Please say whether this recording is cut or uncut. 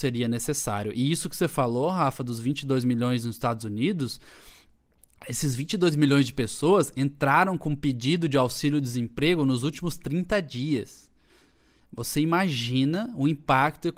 uncut